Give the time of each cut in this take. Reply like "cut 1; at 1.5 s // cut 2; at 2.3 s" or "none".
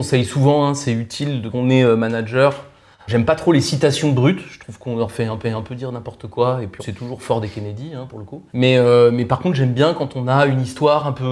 cut 1; at 1.5 s // cut 2; at 3.1 s // cut 3; at 5.4 s // cut 4; at 6.8 s // cut 5; at 8.5 s